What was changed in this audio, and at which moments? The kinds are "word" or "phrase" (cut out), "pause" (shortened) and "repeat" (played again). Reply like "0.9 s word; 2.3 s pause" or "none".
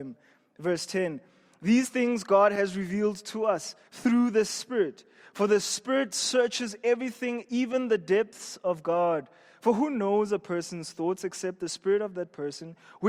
3.9 s pause

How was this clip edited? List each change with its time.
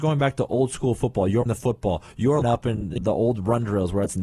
1.5 s word; 2.4 s word; 3.0 s word

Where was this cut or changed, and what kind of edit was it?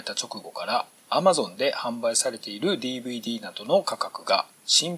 none

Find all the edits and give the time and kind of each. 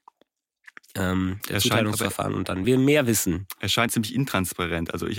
1.4 s word; 2.6 s word; 3.9 s phrase

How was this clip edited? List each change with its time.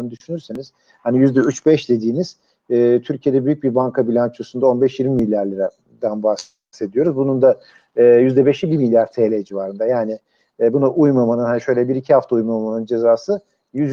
none

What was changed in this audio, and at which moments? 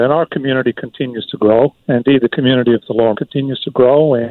1.8 s pause; 3.1 s word

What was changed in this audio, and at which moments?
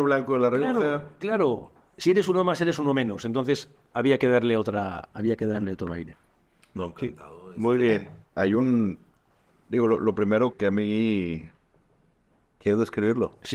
8.2 s pause; 10.5 s word

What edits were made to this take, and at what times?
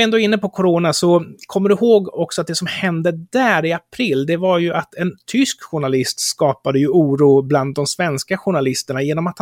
none

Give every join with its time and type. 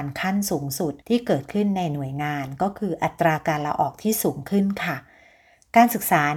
1.0 s pause

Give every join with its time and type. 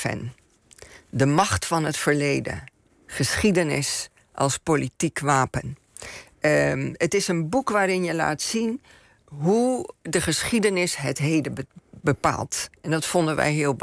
none

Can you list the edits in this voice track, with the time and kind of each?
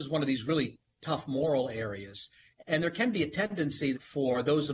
none

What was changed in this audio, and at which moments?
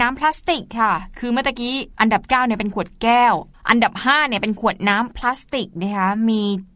1.9 s pause

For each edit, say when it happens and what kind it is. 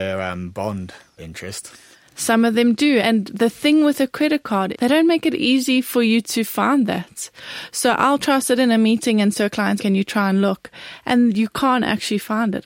1.2 s word; 3.0 s word; 4.7 s word; 9.3 s word; 9.8 s word

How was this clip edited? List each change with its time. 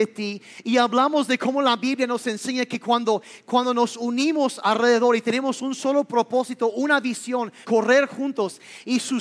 7.6 s word

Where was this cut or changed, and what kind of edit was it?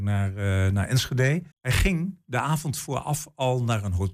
1.5 s pause

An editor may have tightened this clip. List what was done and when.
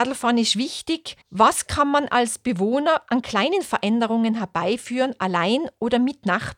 1.2 s pause

